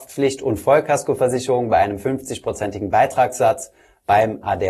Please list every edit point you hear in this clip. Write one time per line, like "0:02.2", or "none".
none